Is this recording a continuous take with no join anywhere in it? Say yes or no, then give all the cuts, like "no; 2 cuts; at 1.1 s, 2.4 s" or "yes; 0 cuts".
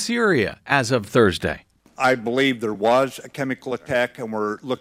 yes; 0 cuts